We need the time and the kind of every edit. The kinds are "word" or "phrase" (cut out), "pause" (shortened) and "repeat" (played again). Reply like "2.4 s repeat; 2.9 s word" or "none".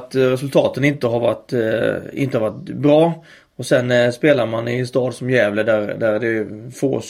none